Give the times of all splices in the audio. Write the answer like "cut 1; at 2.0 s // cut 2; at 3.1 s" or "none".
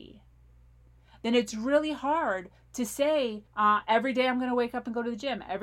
cut 1; at 3.5 s